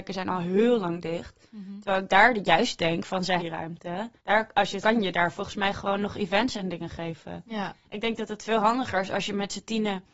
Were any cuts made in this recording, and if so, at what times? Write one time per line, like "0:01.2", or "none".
0:03.4
0:04.2
0:04.8